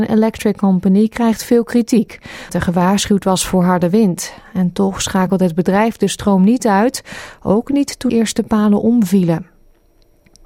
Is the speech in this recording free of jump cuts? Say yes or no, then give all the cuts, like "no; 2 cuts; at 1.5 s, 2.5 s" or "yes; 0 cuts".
no; 2 cuts; at 2.5 s, 8.1 s